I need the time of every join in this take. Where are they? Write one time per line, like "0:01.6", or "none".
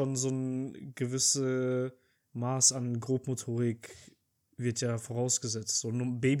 none